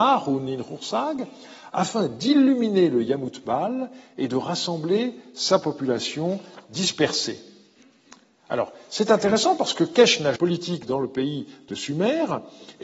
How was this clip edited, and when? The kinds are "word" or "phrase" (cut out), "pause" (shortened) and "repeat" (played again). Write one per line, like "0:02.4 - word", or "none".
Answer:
0:10.4 - phrase